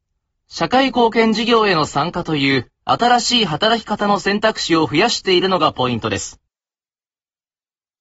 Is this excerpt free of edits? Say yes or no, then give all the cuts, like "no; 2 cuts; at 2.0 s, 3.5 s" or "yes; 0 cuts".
no; 1 cut; at 2.8 s